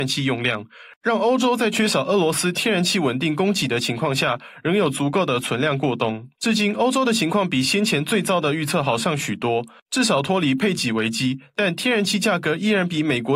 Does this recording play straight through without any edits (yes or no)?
no